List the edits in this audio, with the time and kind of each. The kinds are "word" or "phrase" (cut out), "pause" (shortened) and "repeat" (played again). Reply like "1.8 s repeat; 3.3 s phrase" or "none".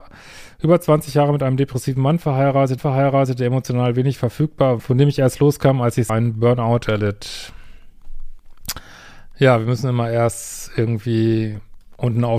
2.8 s repeat; 4.8 s word; 6.1 s word